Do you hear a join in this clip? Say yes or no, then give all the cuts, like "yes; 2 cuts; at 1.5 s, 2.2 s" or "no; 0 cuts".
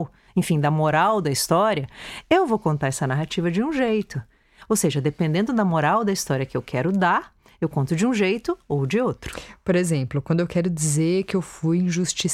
no; 0 cuts